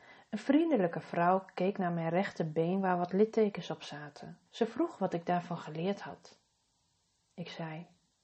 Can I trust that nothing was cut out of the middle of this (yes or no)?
no